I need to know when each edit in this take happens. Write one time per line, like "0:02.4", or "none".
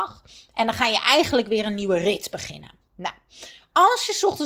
none